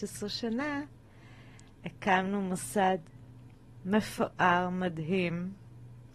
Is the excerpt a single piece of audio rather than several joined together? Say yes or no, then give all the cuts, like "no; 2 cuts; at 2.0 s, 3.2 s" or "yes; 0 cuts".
yes; 0 cuts